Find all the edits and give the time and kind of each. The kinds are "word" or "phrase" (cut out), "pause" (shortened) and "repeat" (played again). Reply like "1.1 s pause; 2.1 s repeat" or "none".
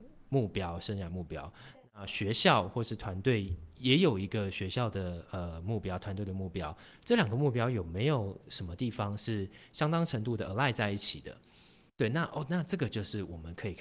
none